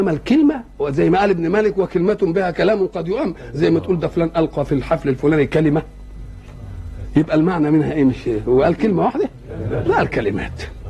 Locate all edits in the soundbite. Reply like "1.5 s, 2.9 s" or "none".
9.9 s